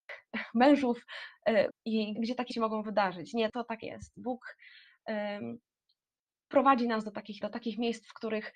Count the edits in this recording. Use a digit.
7